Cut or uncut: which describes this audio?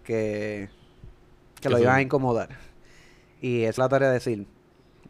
cut